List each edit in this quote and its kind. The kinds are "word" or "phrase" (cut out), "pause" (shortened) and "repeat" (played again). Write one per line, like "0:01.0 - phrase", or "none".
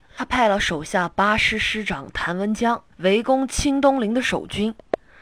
0:02.9 - pause